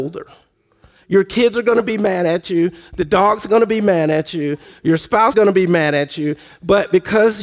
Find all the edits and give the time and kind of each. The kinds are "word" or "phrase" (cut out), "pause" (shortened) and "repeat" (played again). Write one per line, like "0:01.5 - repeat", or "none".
0:05.3 - word